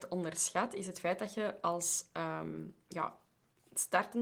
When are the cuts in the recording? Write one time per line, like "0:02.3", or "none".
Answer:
none